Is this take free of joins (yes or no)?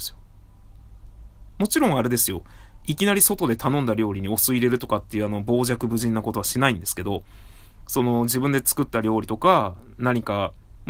yes